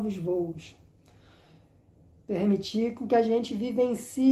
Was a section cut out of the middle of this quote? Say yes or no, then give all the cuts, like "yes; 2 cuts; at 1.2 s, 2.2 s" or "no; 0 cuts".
no; 0 cuts